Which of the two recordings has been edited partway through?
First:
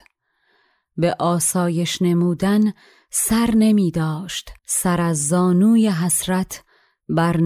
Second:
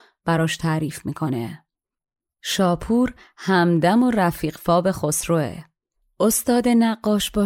first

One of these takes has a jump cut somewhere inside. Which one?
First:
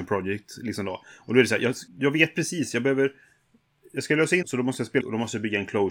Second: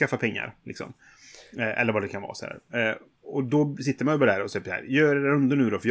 first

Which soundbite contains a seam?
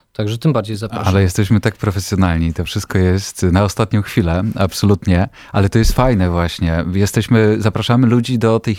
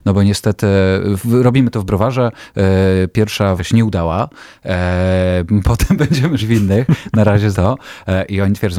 second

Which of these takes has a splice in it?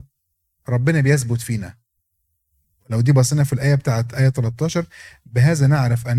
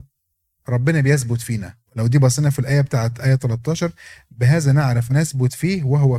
second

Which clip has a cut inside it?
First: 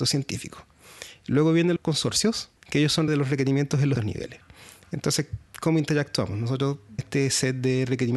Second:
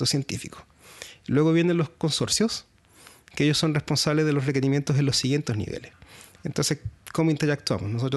first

